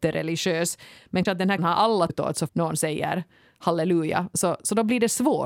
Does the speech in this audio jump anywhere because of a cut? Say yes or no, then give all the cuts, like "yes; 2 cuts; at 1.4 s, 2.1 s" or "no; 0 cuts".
yes; 4 cuts; at 1.3 s, 1.6 s, 2.1 s, 2.5 s